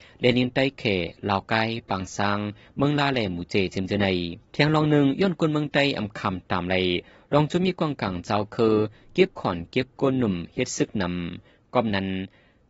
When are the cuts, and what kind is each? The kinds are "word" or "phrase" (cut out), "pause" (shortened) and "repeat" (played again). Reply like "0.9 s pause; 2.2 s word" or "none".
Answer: 4.5 s pause